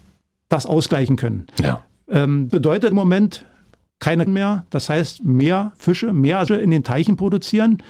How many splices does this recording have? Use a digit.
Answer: 5